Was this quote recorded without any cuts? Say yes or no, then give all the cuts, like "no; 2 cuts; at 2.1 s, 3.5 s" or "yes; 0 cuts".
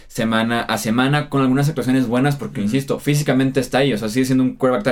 yes; 0 cuts